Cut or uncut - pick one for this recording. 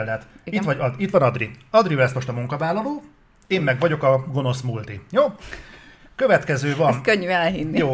uncut